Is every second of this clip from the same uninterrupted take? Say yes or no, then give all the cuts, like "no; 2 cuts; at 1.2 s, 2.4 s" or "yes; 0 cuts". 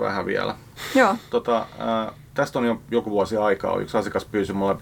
yes; 0 cuts